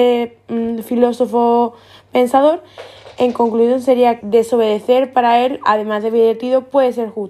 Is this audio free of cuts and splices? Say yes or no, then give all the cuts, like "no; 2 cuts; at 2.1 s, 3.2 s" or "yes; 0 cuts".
no; 1 cut; at 4.2 s